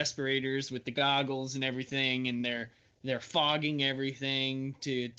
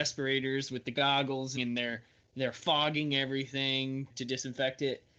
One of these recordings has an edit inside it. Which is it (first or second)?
second